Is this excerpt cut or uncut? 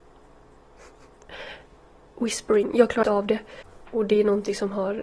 cut